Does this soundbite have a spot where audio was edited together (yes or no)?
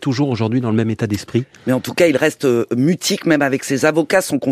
no